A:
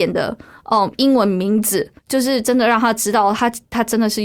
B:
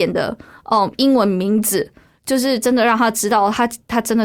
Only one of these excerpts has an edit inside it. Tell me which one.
A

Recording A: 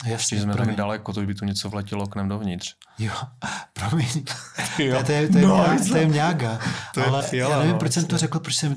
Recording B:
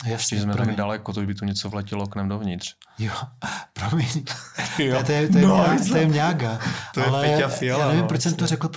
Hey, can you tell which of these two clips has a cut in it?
A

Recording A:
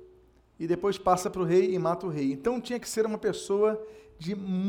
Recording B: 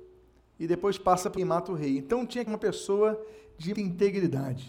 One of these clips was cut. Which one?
B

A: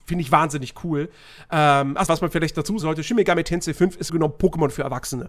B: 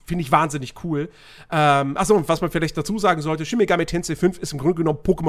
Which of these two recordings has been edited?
A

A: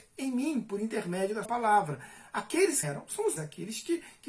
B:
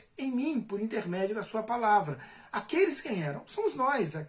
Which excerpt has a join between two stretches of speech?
A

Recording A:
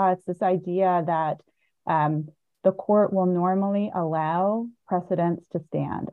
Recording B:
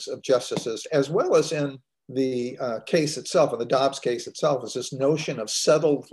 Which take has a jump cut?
B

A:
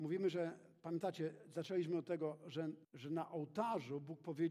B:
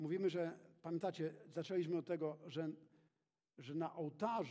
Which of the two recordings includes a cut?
A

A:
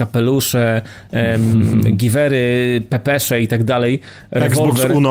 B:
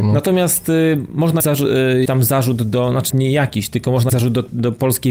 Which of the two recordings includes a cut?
B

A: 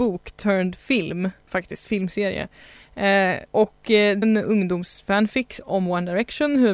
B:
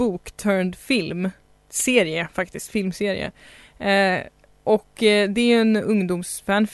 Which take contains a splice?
A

